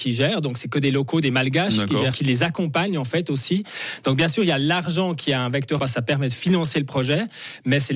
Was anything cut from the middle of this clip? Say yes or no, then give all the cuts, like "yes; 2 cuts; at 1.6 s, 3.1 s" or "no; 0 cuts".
yes; 2 cuts; at 2.1 s, 5.8 s